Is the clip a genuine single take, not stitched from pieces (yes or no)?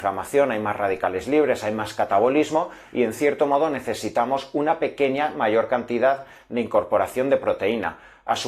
yes